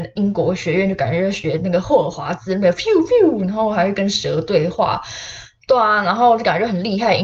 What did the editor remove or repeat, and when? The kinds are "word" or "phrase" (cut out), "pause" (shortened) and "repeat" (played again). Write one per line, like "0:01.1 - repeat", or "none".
none